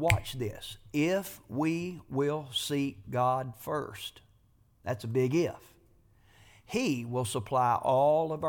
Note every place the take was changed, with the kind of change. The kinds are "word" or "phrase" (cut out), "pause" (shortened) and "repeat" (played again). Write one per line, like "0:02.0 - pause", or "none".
none